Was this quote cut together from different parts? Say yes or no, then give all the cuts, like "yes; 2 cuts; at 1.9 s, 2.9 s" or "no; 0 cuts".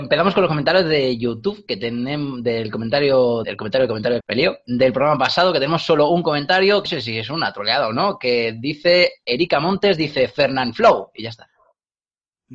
yes; 3 cuts; at 3.4 s, 4.2 s, 6.9 s